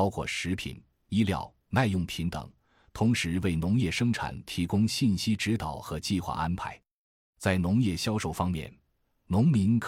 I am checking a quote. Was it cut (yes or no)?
no